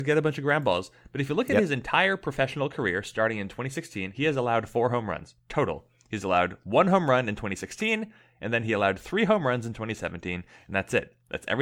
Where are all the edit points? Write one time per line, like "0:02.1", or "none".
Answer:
none